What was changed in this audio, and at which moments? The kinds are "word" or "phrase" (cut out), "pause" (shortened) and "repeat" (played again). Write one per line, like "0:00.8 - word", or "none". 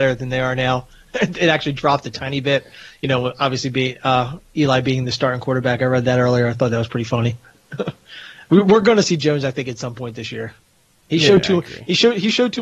none

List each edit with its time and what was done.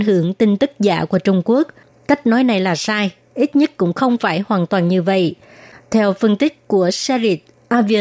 none

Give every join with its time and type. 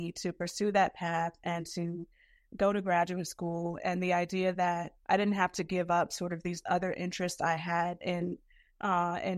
0:05.0 - word

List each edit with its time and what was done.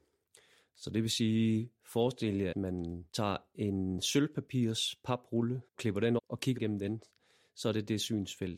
0:02.5 - word
0:05.7 - pause
0:06.2 - word
0:06.6 - word

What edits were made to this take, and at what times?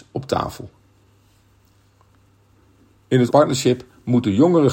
0:03.3 - word

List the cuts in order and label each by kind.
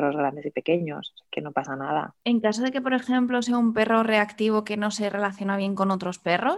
0:01.2 - word

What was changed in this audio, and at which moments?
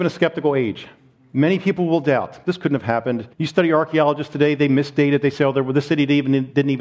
0:03.3 - pause

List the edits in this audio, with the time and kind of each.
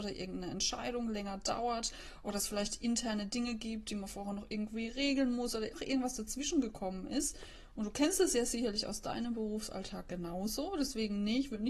0:05.7 - word

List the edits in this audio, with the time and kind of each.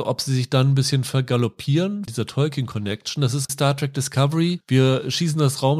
0:02.1 - word
0:03.5 - phrase

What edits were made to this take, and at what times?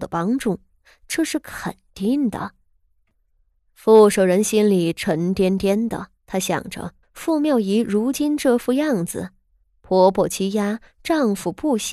0:06.2 - pause
0:07.0 - pause

